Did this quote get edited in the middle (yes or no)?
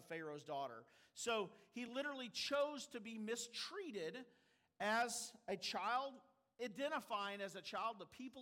no